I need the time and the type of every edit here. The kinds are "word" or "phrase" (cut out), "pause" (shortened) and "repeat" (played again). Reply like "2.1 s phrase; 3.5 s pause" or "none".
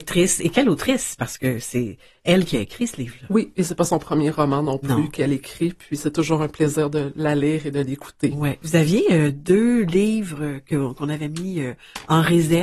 none